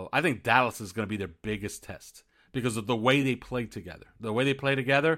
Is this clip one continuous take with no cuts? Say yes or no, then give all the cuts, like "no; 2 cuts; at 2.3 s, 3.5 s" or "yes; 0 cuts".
yes; 0 cuts